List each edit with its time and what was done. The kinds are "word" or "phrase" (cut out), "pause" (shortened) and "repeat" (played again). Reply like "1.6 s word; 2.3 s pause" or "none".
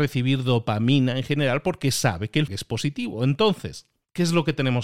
2.5 s word